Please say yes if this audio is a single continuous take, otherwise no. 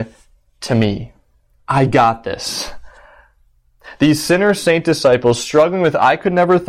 yes